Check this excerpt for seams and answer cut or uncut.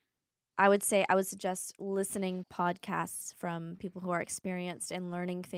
cut